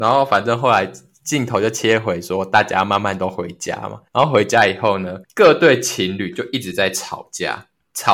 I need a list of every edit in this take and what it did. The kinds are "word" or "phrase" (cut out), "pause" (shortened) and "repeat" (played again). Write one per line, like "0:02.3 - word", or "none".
0:04.1 - pause
0:05.2 - pause